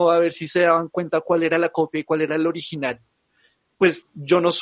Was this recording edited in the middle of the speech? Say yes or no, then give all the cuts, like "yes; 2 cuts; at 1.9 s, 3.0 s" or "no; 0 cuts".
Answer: no; 0 cuts